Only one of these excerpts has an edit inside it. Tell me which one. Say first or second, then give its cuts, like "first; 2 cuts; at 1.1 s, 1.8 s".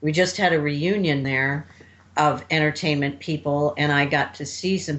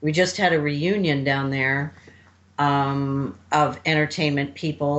first; 2 cuts; at 1.2 s, 2.1 s